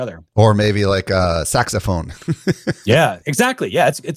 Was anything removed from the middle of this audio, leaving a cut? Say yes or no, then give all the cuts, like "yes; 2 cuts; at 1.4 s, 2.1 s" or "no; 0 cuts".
no; 0 cuts